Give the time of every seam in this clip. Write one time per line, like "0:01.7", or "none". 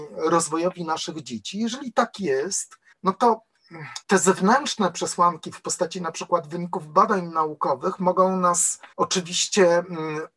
0:02.9
0:04.0
0:08.9